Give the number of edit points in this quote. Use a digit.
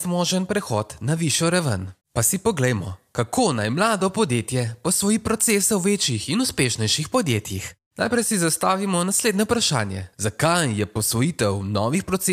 2